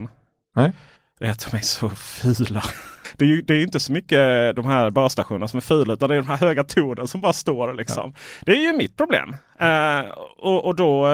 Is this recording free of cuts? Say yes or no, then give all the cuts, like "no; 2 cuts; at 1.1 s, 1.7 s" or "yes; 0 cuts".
yes; 0 cuts